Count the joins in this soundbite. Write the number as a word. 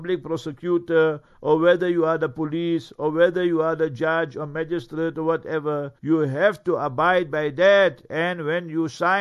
one